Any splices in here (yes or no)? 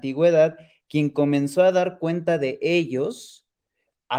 no